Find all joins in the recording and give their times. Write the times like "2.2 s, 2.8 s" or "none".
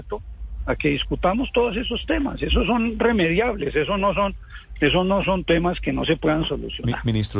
5.5 s